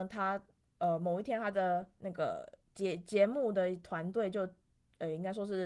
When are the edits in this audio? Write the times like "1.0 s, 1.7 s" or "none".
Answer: none